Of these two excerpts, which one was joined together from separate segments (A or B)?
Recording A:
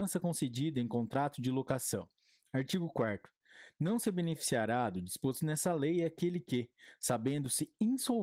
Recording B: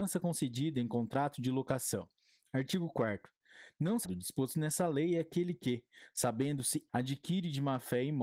B